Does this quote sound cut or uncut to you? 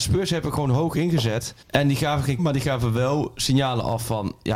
cut